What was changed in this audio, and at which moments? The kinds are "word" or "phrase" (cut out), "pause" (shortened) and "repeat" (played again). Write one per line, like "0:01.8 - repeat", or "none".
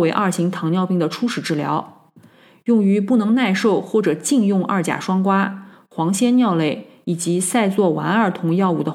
none